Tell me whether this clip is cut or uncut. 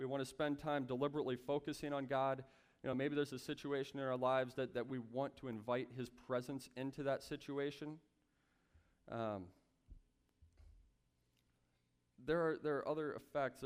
uncut